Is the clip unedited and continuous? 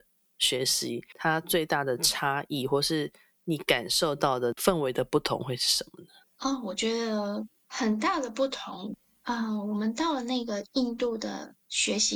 yes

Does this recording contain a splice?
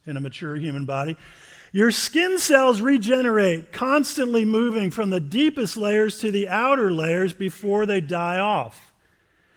no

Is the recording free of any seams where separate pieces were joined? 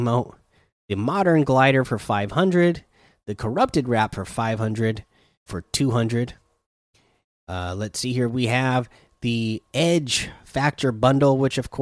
no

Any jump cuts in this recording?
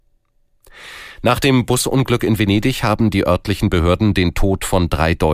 no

